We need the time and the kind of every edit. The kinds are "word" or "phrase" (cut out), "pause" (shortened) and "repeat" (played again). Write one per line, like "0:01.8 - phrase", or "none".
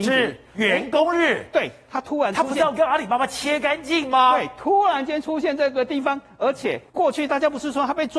0:06.9 - pause

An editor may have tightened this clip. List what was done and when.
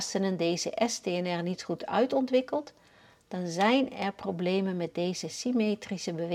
none

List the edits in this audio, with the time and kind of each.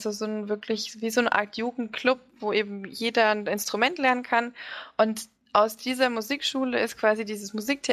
none

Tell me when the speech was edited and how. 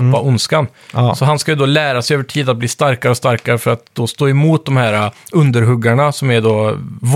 none

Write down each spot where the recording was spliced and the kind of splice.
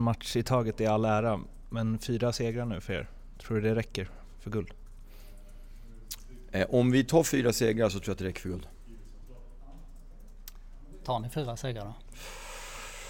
none

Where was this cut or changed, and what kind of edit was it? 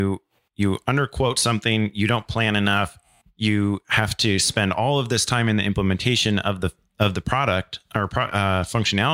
0:03.2 - pause

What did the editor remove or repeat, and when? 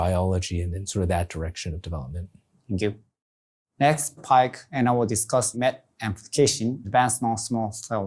0:04.2 - word
0:05.5 - word
0:06.8 - word

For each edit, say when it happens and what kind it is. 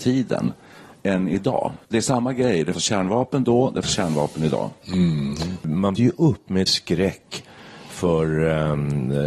0:01.8 - pause
0:02.7 - word
0:03.8 - word
0:06.0 - word
0:06.7 - word

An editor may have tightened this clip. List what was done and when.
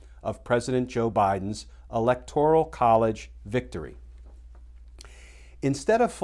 none

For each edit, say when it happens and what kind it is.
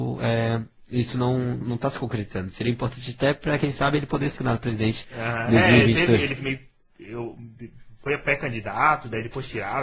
0:01.6 - word
0:04.4 - word
0:06.4 - word

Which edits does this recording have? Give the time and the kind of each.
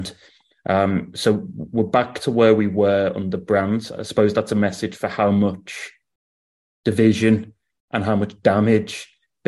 none

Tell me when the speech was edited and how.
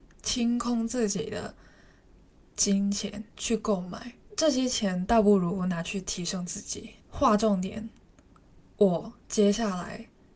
0:04.2 - pause
0:07.0 - pause

